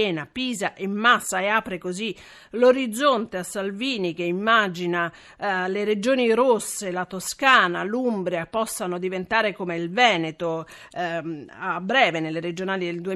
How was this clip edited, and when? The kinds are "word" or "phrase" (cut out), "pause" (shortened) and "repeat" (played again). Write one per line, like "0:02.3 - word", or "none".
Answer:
none